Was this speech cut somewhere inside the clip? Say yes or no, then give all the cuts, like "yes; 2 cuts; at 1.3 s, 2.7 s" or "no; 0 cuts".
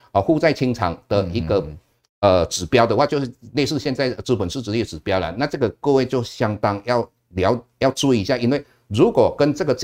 no; 0 cuts